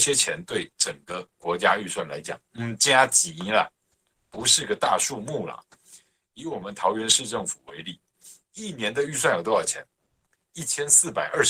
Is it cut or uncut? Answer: uncut